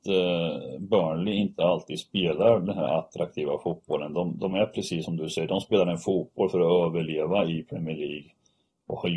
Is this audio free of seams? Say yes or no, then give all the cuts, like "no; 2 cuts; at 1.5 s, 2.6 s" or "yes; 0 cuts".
yes; 0 cuts